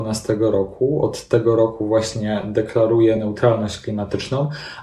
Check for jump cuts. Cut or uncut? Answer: uncut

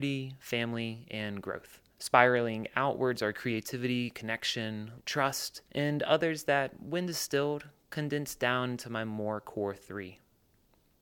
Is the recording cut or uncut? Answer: cut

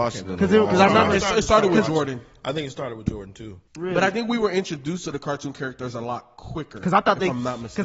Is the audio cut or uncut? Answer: cut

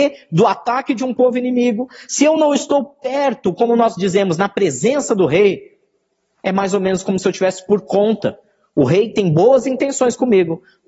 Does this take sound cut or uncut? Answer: uncut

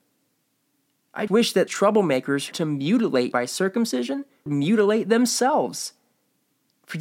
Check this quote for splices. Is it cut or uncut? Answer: cut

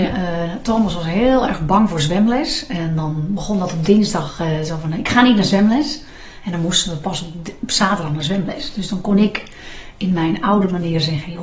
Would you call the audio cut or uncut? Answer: uncut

